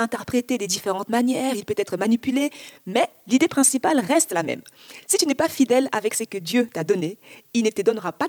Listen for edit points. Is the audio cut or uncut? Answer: uncut